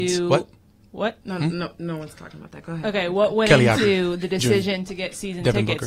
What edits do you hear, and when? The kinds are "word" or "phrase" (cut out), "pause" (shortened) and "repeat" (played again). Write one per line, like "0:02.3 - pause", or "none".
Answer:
none